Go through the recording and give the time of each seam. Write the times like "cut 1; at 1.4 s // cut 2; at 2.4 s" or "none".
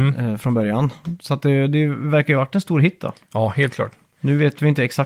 none